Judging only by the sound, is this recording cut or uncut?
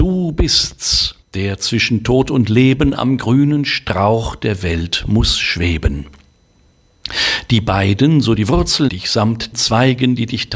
cut